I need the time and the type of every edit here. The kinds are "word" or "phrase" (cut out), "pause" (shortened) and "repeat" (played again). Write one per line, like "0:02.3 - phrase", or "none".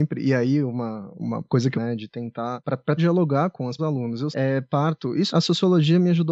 0:01.1 - word
0:01.7 - phrase
0:03.0 - word
0:03.8 - phrase
0:04.3 - word
0:05.3 - word